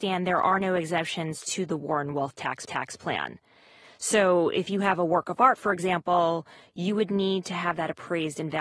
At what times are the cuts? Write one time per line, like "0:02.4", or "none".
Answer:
0:02.7